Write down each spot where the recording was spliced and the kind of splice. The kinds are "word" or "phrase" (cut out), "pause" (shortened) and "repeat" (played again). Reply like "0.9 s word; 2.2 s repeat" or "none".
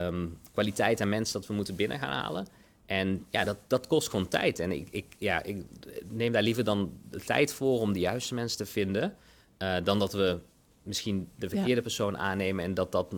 none